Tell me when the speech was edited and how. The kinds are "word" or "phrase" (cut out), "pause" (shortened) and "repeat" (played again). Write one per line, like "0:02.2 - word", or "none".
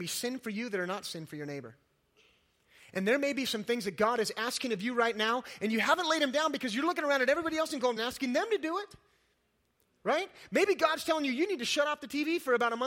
0:08.0 - phrase